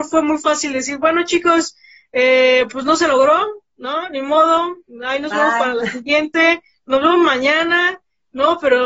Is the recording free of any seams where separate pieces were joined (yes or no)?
yes